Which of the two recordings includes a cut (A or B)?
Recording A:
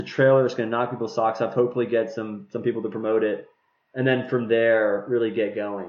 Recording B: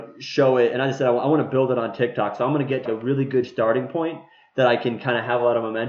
B